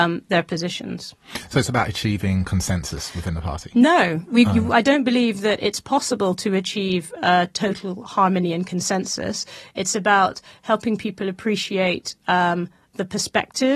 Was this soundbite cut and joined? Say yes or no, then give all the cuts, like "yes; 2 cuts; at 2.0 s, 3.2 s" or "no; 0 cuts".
no; 0 cuts